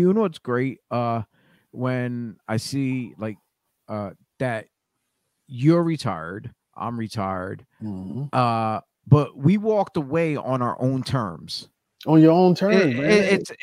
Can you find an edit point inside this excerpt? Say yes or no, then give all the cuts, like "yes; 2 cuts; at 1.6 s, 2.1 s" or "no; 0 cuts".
no; 0 cuts